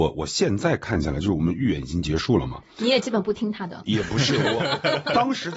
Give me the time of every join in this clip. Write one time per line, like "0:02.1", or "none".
none